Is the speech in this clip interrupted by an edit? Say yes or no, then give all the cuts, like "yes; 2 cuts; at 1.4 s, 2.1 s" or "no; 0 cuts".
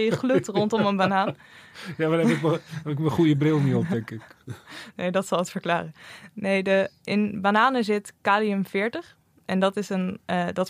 no; 0 cuts